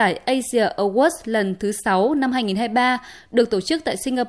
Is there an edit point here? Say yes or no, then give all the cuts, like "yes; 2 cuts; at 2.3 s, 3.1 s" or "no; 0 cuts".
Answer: no; 0 cuts